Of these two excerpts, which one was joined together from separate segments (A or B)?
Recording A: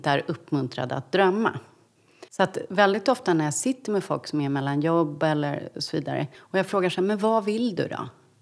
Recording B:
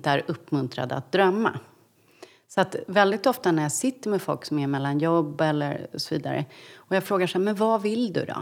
A